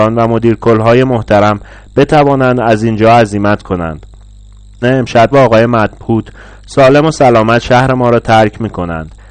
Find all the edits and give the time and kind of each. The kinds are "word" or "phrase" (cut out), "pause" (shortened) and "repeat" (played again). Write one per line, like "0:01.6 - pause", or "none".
0:04.8 - word
0:05.3 - word